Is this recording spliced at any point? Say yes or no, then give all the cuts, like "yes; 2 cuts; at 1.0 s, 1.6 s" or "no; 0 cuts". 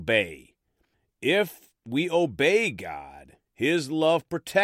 yes; 1 cut; at 3.5 s